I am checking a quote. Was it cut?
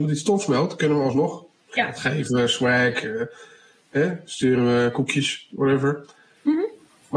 no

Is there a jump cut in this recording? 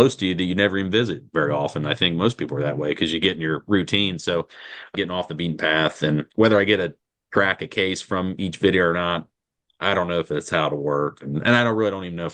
yes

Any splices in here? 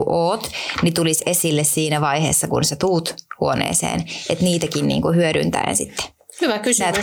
no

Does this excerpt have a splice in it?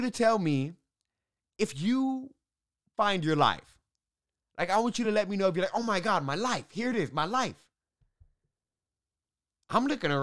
no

